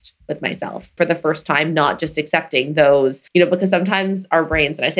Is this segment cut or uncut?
cut